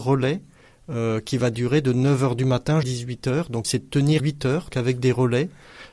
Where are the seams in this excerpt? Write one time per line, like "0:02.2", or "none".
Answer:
0:02.8
0:03.6
0:04.2
0:04.7

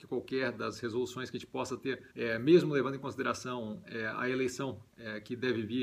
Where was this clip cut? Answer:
0:02.1
0:04.9

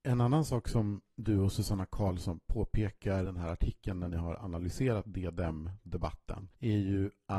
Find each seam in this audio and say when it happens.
0:03.2

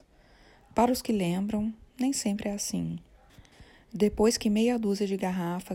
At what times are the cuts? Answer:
none

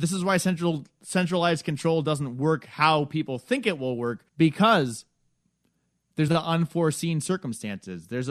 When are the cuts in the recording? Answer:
0:04.3
0:06.3

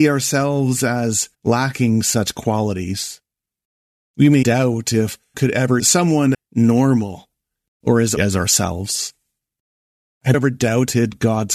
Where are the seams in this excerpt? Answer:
0:01.3
0:04.4
0:05.3
0:05.8
0:06.3
0:08.2
0:10.3

